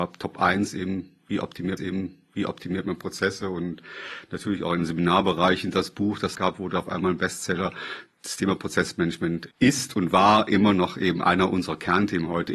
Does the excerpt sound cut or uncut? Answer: cut